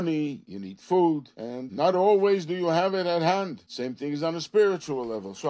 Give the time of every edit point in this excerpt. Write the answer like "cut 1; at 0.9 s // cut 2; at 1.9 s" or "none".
none